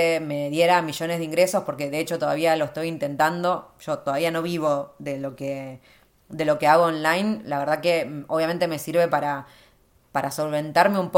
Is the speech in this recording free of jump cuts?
yes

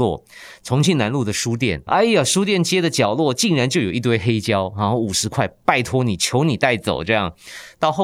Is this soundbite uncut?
no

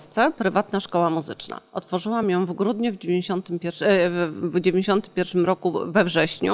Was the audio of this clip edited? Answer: no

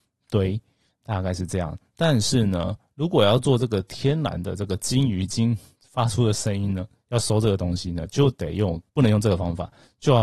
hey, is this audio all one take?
no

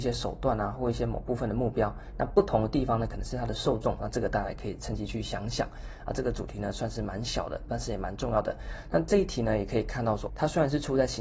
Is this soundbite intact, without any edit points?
no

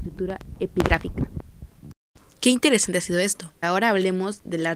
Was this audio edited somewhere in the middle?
yes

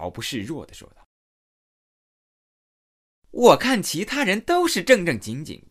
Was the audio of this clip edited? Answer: no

